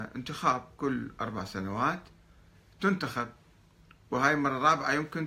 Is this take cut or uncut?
uncut